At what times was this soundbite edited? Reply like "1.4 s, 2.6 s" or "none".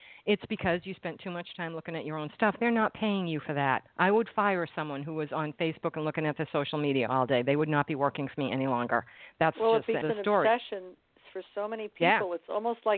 10.0 s